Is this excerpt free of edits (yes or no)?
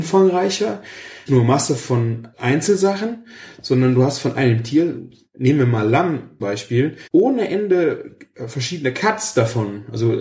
no